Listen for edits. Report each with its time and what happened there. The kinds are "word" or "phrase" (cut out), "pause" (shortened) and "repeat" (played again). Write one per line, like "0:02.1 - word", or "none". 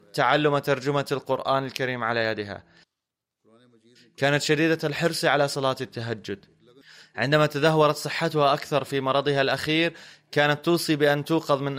0:06.8 - pause

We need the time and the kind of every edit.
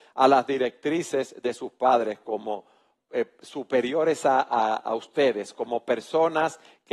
none

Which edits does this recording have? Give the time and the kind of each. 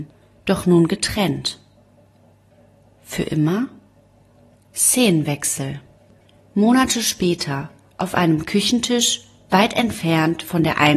none

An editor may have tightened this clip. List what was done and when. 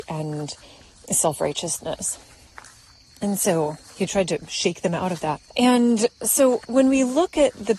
0:05.5 - pause

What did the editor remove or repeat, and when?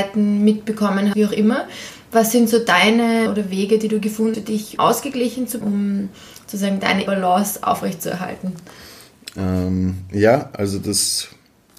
0:01.1 - word
0:03.3 - word
0:04.3 - word
0:04.8 - word
0:05.6 - word
0:07.1 - word

